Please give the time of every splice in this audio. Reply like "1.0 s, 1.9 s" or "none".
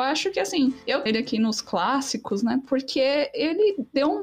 1.1 s